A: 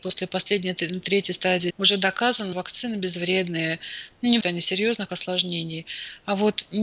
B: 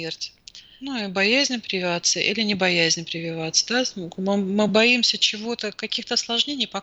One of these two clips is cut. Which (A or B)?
A